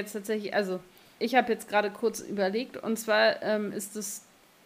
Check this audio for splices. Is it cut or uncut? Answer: cut